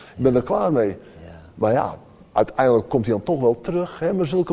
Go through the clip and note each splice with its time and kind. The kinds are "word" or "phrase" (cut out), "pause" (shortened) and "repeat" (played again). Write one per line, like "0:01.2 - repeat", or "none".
none